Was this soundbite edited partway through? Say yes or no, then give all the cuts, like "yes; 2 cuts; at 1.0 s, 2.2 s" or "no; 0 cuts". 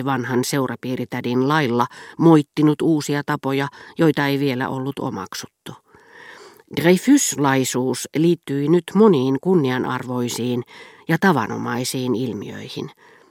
no; 0 cuts